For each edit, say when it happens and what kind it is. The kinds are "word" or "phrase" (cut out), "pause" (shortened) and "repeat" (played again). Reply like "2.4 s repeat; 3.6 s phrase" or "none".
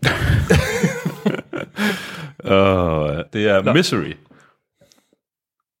3.3 s word